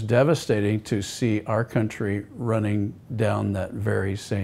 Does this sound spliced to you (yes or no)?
no